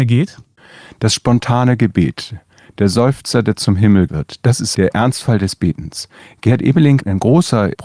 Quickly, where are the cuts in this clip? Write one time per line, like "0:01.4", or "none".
0:04.1
0:04.7